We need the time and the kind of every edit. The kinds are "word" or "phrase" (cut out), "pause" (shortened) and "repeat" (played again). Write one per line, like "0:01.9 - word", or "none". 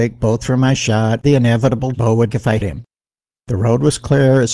0:01.2 - word
0:01.9 - word
0:02.3 - word
0:02.6 - word